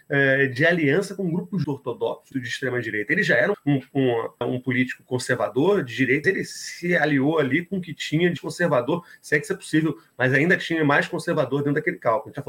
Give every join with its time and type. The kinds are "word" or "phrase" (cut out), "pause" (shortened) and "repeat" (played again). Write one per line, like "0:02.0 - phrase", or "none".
0:01.6 - word
0:02.3 - word
0:03.5 - word
0:04.4 - word
0:06.2 - word
0:08.4 - word